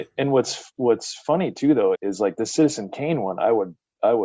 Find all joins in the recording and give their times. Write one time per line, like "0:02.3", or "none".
0:01.9

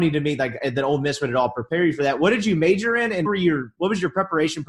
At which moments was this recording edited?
0:03.3

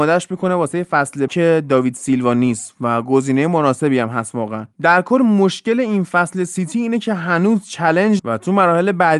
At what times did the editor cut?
0:01.3
0:08.2

